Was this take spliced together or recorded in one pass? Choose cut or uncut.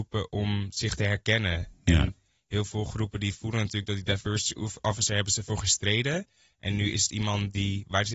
uncut